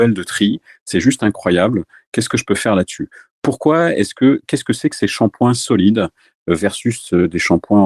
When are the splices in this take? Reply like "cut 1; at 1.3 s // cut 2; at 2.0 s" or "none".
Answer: none